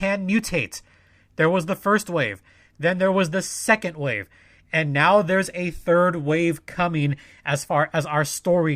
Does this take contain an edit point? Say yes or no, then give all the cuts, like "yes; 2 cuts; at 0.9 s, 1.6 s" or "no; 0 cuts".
no; 0 cuts